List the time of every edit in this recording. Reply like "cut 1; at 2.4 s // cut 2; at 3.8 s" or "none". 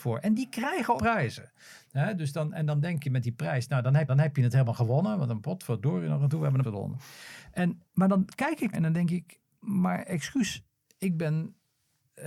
cut 1; at 1.0 s // cut 2; at 3.0 s // cut 3; at 4.1 s // cut 4; at 6.6 s // cut 5; at 7.9 s // cut 6; at 8.7 s